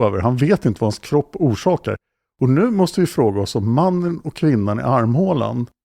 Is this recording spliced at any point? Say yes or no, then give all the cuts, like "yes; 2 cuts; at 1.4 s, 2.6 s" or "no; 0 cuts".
no; 0 cuts